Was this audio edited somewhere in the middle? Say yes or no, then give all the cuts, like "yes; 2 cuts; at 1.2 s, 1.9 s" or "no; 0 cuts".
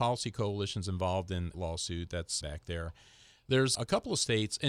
yes; 3 cuts; at 1.5 s, 2.4 s, 3.7 s